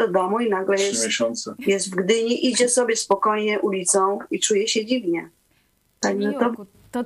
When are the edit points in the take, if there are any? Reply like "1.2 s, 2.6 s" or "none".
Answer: none